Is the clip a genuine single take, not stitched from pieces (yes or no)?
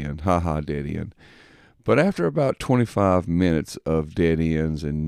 yes